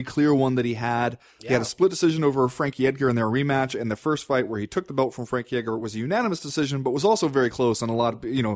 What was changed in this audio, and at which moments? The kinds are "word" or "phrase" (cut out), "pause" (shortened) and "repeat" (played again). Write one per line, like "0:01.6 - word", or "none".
none